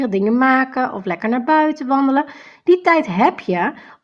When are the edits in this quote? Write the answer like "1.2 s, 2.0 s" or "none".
none